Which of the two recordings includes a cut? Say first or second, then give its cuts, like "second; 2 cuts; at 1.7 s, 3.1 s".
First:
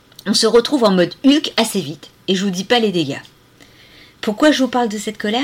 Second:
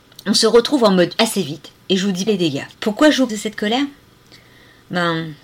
second; 4 cuts; at 1.2 s, 2.3 s, 2.7 s, 3.3 s